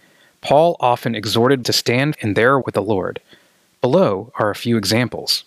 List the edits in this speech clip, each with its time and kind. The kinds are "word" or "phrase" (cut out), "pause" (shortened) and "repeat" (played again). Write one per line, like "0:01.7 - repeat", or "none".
0:01.6 - word
0:02.1 - word
0:02.6 - word